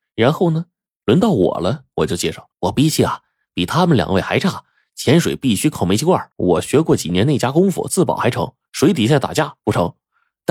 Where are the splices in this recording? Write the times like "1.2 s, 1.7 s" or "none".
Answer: 2.5 s, 6.3 s